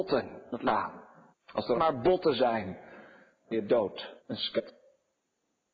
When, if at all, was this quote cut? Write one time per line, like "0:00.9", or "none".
0:01.3
0:01.7
0:03.5
0:04.2